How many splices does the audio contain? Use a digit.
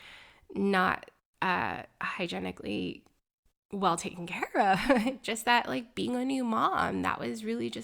0